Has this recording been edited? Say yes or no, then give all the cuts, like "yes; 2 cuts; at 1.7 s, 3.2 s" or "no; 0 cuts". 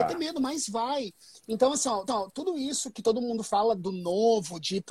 yes; 1 cut; at 2.1 s